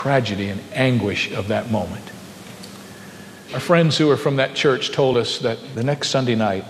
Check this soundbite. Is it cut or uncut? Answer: uncut